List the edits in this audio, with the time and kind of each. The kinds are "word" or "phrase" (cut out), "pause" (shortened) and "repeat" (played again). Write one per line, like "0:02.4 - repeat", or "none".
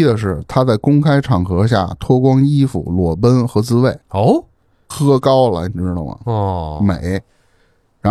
0:04.0 - pause